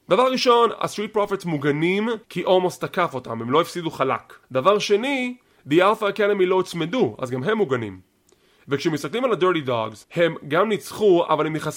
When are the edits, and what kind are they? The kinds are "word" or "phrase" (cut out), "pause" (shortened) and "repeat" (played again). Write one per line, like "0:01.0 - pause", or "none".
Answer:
0:02.2 - pause
0:04.4 - pause
0:10.0 - pause